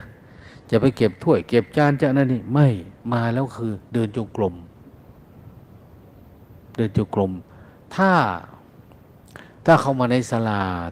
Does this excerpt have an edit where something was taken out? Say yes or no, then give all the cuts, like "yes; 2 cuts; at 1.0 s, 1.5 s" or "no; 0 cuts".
no; 0 cuts